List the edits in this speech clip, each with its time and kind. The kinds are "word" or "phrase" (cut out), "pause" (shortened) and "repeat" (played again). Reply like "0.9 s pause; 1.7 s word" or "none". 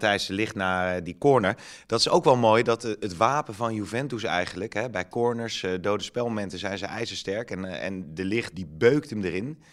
8.5 s word